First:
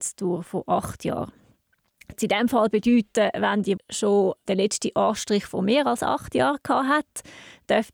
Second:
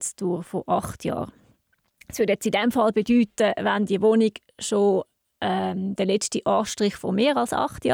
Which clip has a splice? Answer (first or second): first